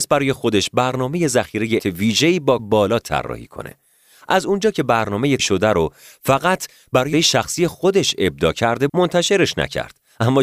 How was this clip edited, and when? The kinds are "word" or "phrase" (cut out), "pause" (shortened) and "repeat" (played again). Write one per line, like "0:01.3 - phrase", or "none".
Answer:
0:01.8 - word
0:02.6 - word
0:05.4 - word
0:07.1 - word
0:08.9 - word